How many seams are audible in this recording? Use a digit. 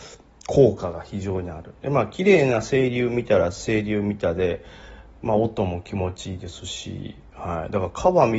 1